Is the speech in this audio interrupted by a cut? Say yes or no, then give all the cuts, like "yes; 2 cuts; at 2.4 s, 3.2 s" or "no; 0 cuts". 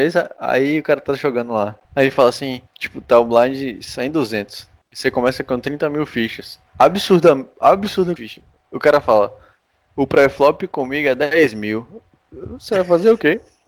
yes; 4 cuts; at 1.8 s, 2.7 s, 6.7 s, 8.2 s